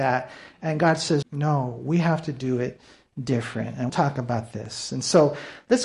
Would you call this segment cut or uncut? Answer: cut